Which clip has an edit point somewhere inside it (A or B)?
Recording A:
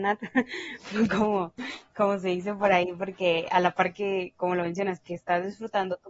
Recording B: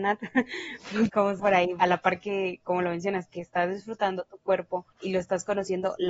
B